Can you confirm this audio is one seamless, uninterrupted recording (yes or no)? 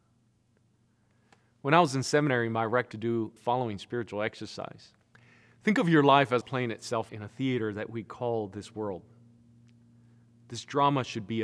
no